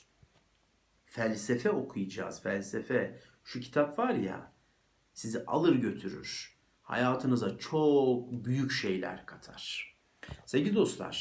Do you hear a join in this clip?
no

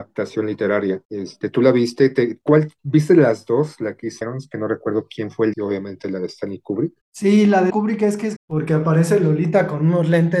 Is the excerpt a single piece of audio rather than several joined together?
no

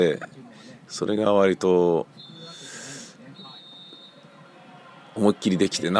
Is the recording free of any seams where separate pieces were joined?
yes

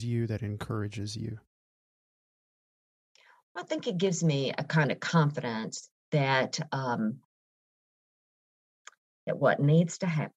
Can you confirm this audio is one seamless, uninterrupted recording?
yes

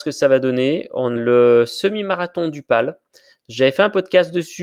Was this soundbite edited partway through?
yes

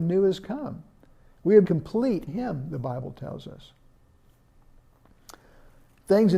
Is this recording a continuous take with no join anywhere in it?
no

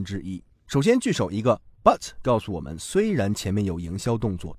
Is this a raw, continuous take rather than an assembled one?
yes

